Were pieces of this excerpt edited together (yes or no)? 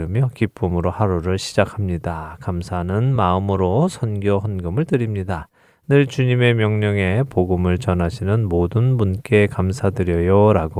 no